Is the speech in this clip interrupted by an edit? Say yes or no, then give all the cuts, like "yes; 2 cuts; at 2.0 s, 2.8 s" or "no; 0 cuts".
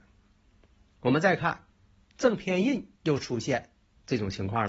yes; 1 cut; at 3.0 s